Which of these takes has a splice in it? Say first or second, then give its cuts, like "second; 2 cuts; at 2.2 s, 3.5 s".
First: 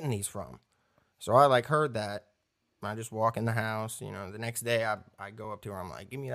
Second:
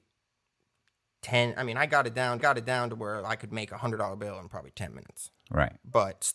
second; 1 cut; at 2.4 s